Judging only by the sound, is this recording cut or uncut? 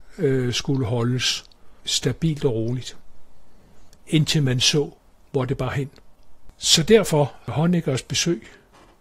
uncut